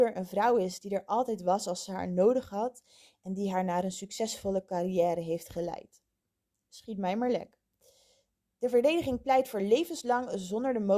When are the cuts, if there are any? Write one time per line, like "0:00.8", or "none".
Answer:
none